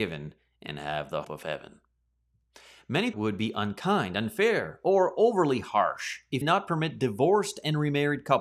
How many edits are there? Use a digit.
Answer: 3